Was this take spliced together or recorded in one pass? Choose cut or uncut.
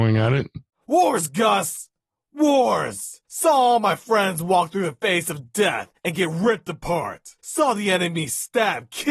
cut